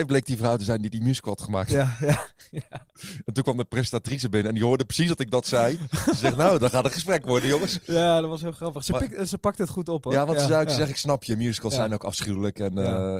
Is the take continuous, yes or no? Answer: no